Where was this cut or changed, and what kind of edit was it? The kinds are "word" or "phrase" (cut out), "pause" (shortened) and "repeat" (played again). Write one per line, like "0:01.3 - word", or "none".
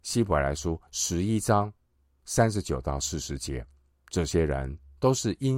0:03.9 - pause